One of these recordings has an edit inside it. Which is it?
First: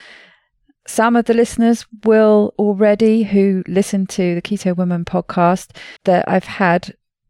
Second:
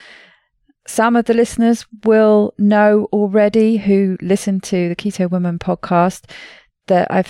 first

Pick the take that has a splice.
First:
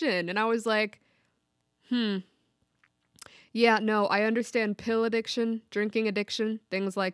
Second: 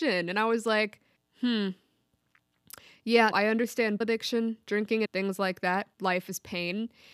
second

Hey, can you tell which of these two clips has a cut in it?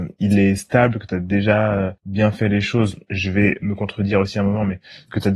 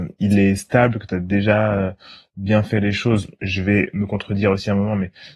first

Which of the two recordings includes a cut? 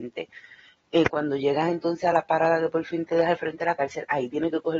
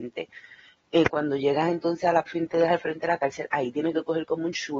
second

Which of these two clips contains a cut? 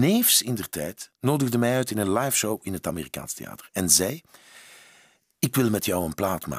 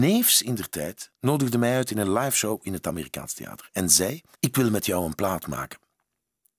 second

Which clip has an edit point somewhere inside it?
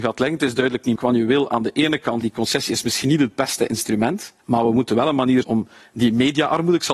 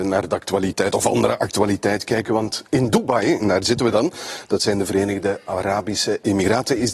first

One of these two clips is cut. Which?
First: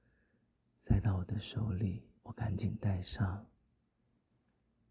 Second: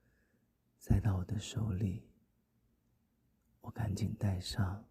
first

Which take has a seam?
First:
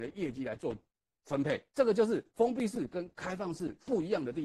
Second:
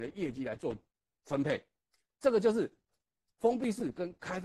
first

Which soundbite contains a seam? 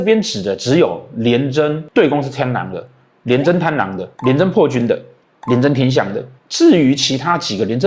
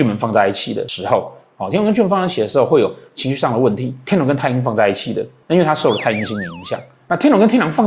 first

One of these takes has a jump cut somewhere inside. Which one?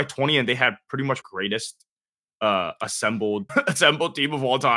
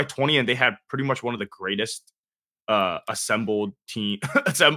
first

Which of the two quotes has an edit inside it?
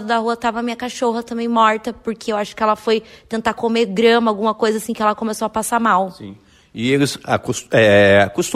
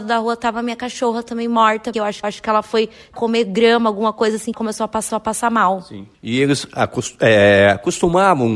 second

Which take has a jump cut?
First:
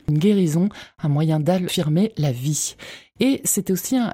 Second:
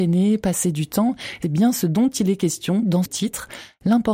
second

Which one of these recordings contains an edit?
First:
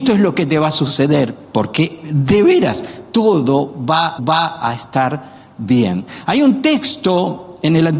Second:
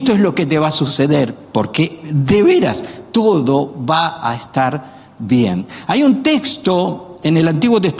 first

